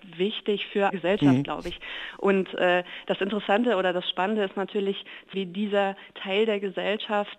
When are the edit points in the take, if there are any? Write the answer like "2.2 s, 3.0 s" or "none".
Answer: 0.9 s, 5.3 s